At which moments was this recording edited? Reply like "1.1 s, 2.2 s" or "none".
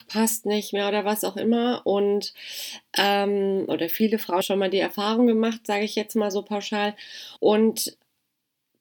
4.4 s, 7.4 s